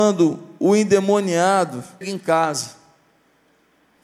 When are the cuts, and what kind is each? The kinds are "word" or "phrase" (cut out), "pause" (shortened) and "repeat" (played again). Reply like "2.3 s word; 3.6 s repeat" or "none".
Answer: 2.0 s word